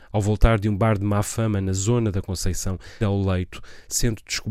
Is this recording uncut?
no; 1 cut; at 3.0 s

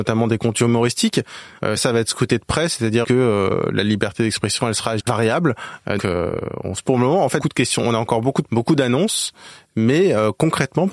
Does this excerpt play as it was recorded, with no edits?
no; 7 cuts; at 1.8 s, 3.0 s, 5.0 s, 6.0 s, 6.8 s, 7.4 s, 8.5 s

